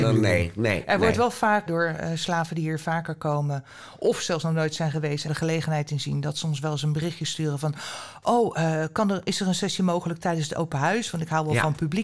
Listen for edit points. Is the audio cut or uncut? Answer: cut